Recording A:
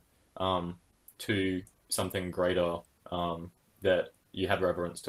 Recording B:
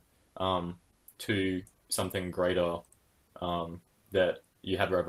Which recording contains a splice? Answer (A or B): A